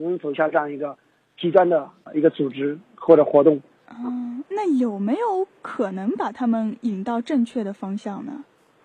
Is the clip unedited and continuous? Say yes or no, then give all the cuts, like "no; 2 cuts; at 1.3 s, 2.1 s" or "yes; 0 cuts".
yes; 0 cuts